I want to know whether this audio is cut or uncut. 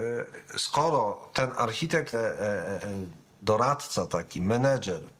cut